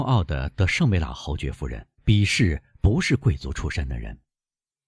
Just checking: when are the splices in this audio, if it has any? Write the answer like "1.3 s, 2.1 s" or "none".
2.0 s

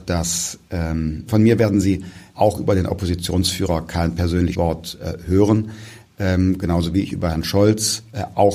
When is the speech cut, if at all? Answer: 1.3 s, 2.3 s, 4.5 s

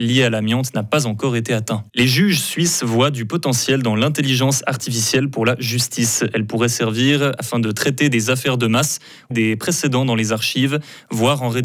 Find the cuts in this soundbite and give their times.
1.9 s, 9.3 s

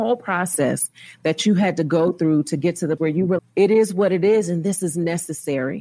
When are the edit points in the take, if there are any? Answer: 3.0 s, 3.4 s

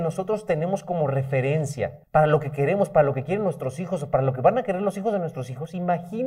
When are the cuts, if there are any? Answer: 2.0 s

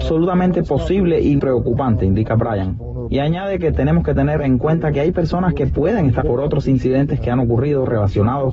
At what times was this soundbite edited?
1.4 s, 6.2 s

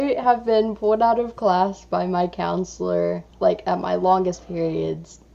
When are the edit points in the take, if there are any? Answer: 3.3 s

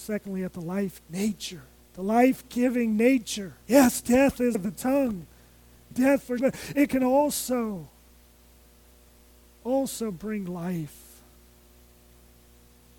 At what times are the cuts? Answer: 1.0 s, 1.8 s, 3.6 s, 4.5 s, 5.9 s, 6.4 s

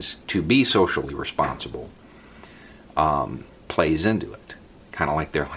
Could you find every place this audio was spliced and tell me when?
none

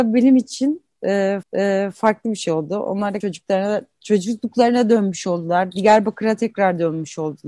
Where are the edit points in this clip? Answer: 1.4 s, 3.2 s

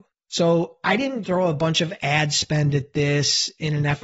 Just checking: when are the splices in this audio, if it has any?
1.2 s

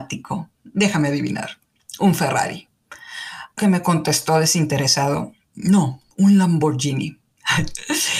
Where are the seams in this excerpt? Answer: 3.6 s, 6.1 s

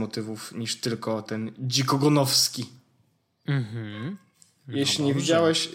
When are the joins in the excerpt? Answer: none

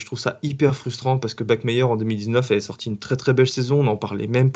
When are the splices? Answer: none

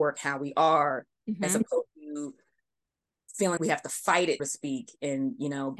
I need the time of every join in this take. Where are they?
1.9 s, 3.6 s, 4.4 s

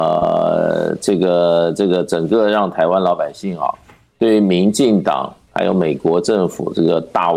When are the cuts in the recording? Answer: none

